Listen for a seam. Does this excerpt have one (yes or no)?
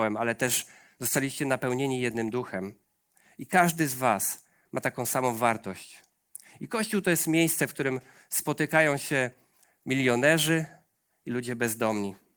no